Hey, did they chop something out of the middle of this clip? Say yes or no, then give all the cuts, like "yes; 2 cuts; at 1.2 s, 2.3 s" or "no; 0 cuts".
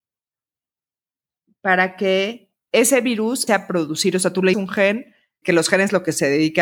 yes; 4 cuts; at 2.7 s, 3.5 s, 4.5 s, 5.4 s